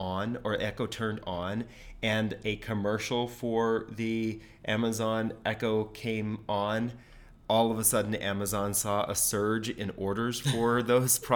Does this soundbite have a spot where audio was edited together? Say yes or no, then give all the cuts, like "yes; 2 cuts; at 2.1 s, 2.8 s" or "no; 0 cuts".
no; 0 cuts